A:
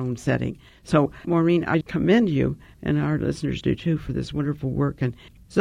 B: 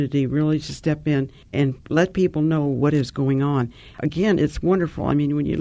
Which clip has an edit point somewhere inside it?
A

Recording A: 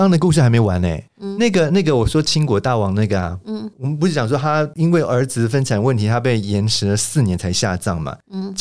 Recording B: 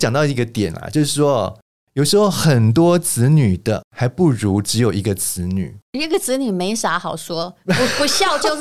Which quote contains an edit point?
A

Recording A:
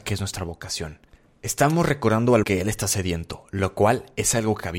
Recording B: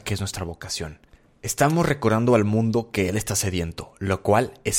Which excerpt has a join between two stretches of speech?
A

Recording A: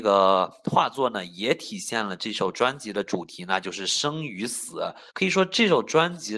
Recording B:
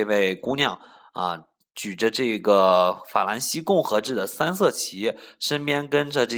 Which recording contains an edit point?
A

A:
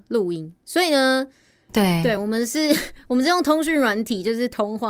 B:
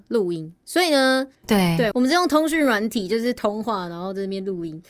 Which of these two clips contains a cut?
B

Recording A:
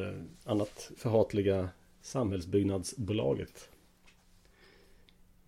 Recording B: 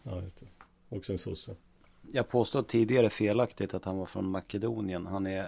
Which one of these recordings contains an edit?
A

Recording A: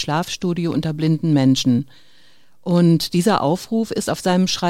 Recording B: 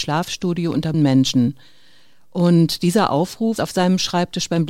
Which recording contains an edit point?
B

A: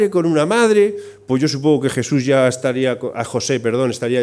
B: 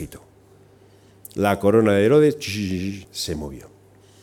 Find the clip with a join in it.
B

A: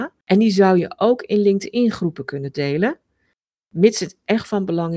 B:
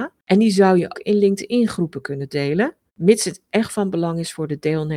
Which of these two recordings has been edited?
B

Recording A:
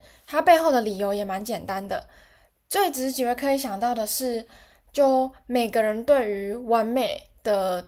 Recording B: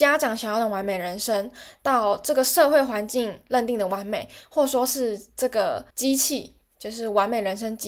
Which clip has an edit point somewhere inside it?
B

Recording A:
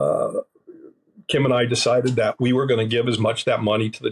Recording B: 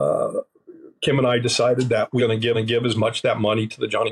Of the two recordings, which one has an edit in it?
B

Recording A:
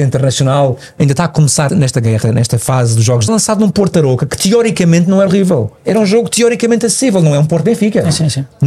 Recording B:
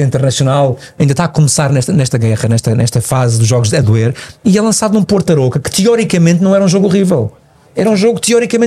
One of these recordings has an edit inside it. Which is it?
A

